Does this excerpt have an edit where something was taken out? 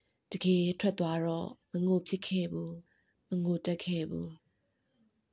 yes; 3 cuts; at 1.6 s, 2.9 s, 4.4 s

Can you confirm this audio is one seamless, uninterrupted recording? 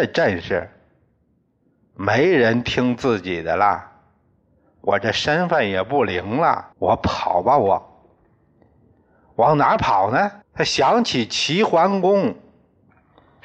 no; 2 cuts; at 6.7 s, 10.4 s

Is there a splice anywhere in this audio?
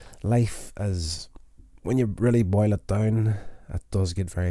no; 0 cuts

